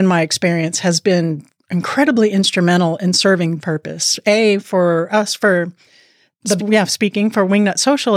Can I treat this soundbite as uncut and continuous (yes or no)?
no